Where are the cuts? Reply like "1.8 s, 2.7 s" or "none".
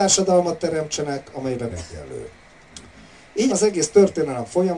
1.7 s, 3.5 s